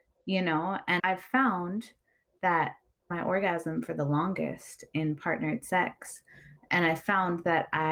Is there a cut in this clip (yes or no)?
yes